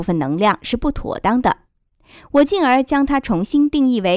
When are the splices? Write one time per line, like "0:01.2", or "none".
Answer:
none